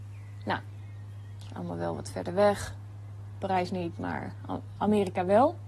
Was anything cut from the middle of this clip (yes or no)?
no